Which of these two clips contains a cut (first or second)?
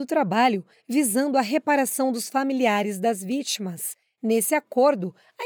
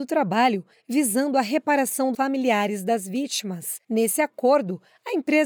second